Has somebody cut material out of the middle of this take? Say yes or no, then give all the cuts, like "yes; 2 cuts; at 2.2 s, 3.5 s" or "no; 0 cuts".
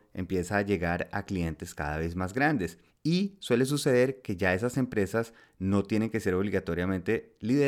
yes; 1 cut; at 2.9 s